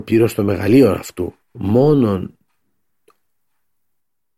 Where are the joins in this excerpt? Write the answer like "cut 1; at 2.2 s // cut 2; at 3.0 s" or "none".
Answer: cut 1; at 1.4 s